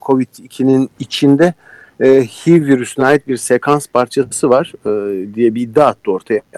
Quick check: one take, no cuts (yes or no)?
yes